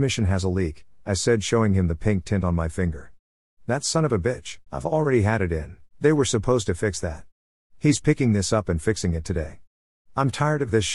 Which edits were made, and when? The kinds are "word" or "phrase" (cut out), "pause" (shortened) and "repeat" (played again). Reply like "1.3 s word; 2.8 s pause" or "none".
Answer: 4.7 s pause; 5.9 s pause